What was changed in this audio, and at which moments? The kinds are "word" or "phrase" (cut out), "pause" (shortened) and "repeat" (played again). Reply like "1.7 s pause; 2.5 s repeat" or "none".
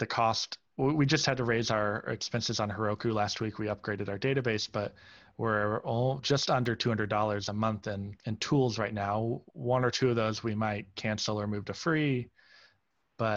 8.2 s pause